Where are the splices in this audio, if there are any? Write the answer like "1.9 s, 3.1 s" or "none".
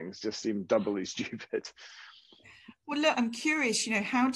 3.1 s